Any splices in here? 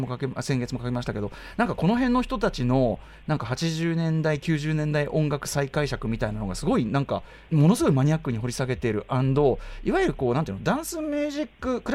yes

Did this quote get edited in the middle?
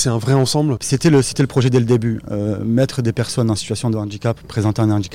no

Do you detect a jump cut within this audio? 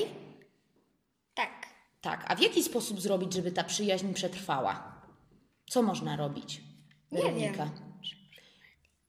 no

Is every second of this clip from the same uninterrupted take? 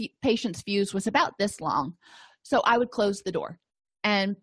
yes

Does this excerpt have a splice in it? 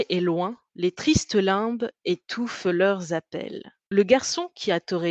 no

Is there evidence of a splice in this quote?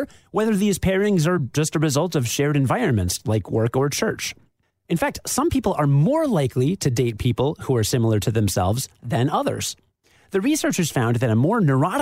no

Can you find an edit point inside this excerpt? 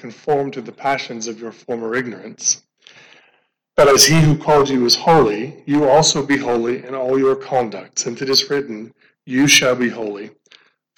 no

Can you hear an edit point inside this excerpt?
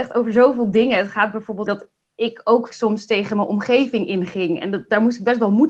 yes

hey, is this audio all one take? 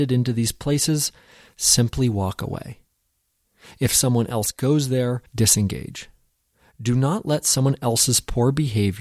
no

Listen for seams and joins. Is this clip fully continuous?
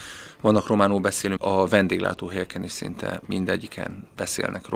no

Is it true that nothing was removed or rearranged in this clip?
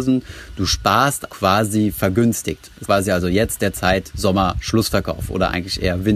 no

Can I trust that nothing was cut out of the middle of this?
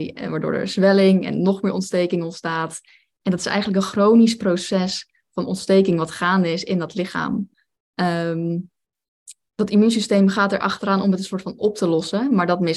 yes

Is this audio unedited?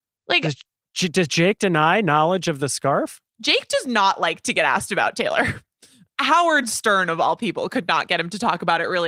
no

